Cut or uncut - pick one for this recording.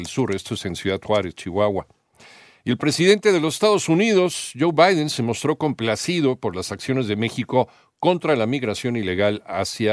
uncut